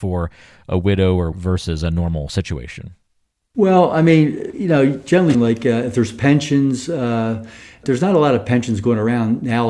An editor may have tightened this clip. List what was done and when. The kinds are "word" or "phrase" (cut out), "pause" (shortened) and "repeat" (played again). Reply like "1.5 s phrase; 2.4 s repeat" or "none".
1.3 s word; 5.3 s word